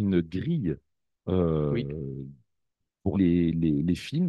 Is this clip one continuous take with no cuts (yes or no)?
no